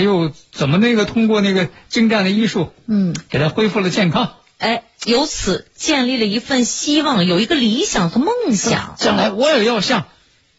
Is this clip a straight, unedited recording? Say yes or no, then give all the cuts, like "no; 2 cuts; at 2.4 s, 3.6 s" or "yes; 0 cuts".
yes; 0 cuts